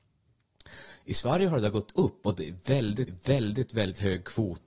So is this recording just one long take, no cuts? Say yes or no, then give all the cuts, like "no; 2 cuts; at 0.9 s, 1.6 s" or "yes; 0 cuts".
no; 1 cut; at 3.1 s